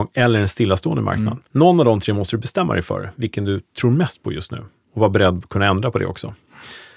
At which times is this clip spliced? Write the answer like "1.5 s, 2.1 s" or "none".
1.5 s

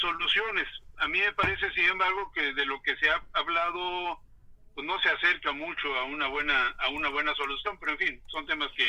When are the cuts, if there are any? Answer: none

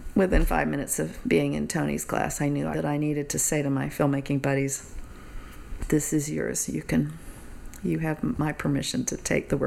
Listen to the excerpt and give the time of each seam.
2.7 s

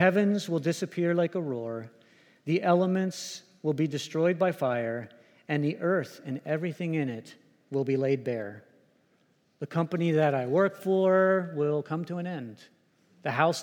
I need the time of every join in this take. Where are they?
none

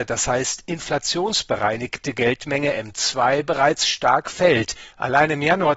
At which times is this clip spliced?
none

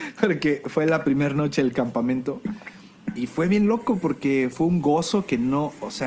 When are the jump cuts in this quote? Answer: none

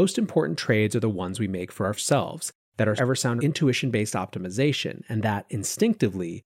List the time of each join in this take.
2.0 s, 3.0 s, 3.4 s

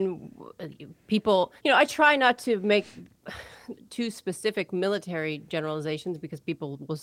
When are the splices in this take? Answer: 1.6 s, 3.7 s

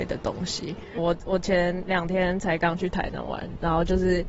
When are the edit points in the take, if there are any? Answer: 1.0 s

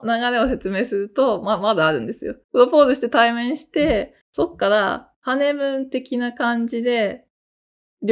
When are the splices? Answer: 2.4 s, 4.2 s

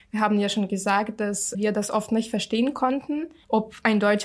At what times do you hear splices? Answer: 1.5 s

